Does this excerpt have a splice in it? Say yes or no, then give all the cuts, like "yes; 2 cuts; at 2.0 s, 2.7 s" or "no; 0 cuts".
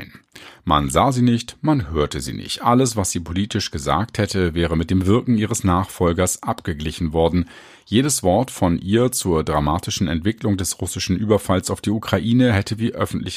no; 0 cuts